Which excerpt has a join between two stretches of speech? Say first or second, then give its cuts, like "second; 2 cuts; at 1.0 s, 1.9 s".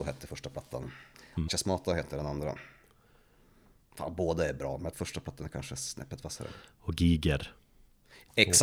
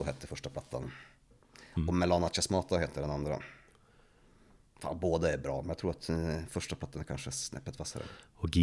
first; 3 cuts; at 1.1 s, 1.5 s, 4.9 s